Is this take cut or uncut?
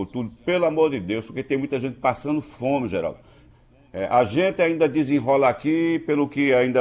uncut